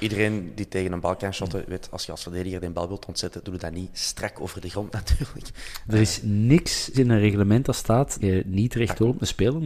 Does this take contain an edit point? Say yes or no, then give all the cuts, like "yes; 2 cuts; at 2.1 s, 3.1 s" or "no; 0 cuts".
yes; 2 cuts; at 6.9 s, 8.2 s